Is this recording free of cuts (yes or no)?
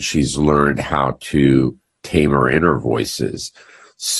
yes